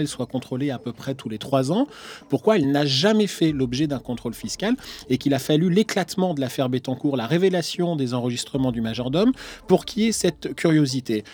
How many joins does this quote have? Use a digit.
0